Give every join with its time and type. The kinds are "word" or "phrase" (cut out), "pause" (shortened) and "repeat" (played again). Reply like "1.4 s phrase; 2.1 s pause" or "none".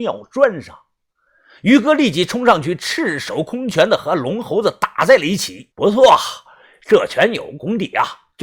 5.7 s pause